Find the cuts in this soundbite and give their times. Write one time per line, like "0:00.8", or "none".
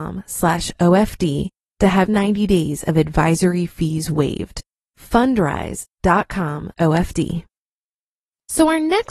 0:02.1
0:06.7